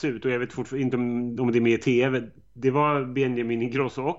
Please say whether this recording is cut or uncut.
uncut